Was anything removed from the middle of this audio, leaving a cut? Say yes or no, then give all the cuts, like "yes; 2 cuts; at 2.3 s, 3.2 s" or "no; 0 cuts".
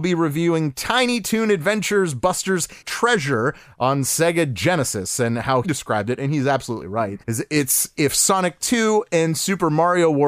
yes; 4 cuts; at 2.8 s, 5.6 s, 7.2 s, 8.0 s